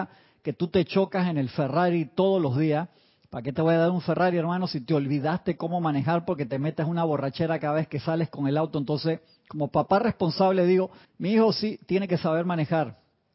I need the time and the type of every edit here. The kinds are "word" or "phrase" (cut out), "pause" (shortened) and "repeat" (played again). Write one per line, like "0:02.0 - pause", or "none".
0:11.0 - pause

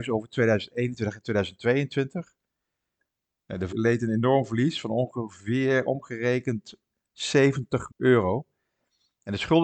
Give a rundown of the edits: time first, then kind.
0:03.7 - word
0:07.9 - word

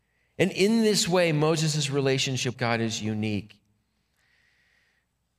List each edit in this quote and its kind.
0:02.5 - word

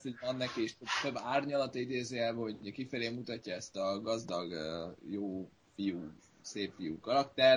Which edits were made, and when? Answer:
none

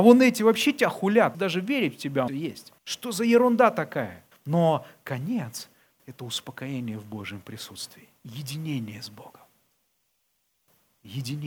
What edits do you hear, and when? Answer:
0:01.3 - word
0:02.3 - phrase
0:02.8 - pause
0:04.3 - pause
0:08.2 - pause

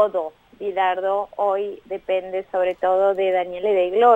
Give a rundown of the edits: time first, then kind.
none

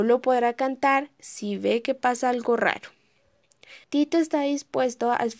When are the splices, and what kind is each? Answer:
0:03.8 - pause

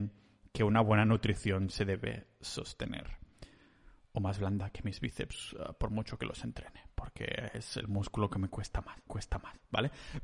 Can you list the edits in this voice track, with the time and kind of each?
0:09.1 - repeat

